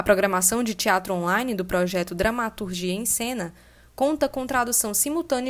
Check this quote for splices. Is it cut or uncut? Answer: uncut